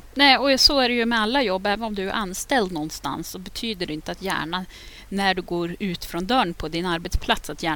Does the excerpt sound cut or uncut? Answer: uncut